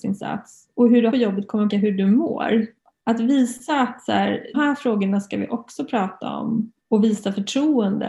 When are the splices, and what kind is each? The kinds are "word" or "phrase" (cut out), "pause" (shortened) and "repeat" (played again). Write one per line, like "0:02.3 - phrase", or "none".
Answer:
0:01.1 - phrase
0:01.7 - word
0:02.8 - pause
0:04.5 - word
0:06.8 - pause